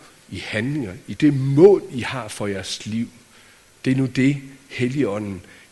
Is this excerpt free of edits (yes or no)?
no